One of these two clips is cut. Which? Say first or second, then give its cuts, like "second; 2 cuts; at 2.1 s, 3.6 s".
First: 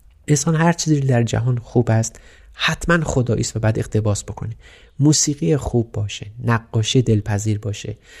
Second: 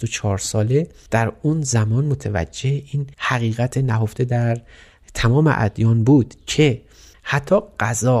second; 1 cut; at 3.1 s